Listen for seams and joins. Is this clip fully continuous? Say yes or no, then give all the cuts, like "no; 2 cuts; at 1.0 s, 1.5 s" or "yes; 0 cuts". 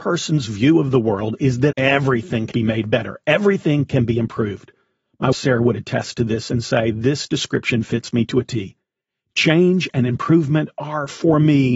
no; 3 cuts; at 1.7 s, 2.5 s, 5.3 s